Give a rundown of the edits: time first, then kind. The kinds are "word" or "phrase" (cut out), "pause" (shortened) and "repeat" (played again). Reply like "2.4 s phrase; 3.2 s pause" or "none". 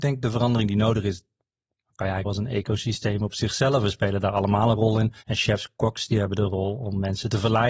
2.2 s word; 5.2 s pause